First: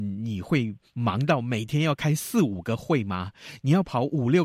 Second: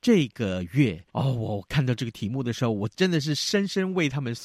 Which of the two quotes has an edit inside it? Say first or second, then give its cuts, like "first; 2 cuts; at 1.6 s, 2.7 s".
second; 1 cut; at 1.1 s